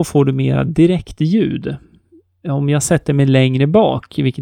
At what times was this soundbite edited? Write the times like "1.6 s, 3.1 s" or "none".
none